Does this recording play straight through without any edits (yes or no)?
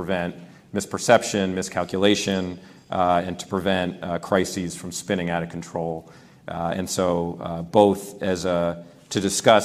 yes